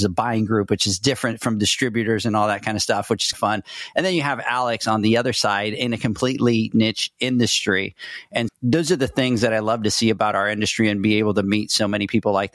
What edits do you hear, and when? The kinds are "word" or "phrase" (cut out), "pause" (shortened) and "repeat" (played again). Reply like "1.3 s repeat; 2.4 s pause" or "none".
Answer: 8.5 s word